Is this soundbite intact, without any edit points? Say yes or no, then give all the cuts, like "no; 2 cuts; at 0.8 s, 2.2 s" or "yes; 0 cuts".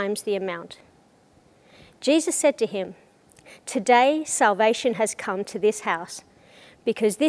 yes; 0 cuts